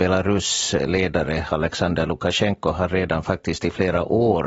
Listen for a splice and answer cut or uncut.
uncut